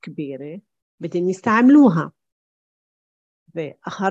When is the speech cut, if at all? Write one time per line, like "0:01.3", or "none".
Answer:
none